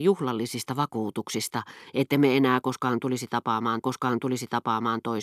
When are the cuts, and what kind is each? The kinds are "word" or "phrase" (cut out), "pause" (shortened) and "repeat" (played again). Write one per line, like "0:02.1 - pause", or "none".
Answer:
0:03.8 - repeat